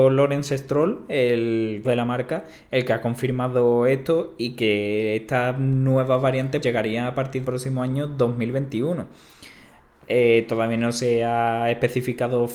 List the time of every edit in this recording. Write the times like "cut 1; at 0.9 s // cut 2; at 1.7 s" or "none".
cut 1; at 1.8 s // cut 2; at 6.6 s // cut 3; at 7.4 s